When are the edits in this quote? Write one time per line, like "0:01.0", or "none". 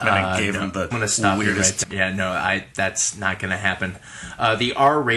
0:00.9
0:01.8